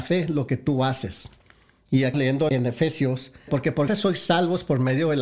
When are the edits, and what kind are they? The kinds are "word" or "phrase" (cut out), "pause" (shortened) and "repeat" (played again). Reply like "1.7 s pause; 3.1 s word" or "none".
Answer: 2.1 s word; 2.5 s word; 3.5 s word; 3.9 s word

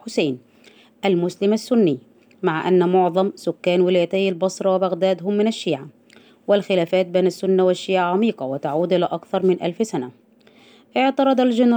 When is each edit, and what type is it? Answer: none

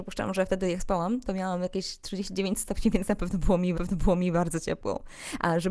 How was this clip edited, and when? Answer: 3.7 s repeat

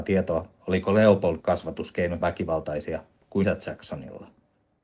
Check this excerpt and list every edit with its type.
1.4 s word; 2.2 s word; 3.4 s word

